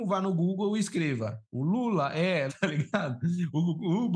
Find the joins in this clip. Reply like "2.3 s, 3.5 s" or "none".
1.4 s, 2.5 s